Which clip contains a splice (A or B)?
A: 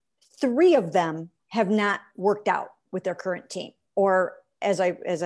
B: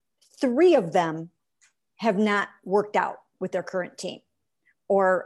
A